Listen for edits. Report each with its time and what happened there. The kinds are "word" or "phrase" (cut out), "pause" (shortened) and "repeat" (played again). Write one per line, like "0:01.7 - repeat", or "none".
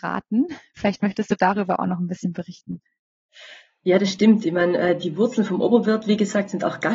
none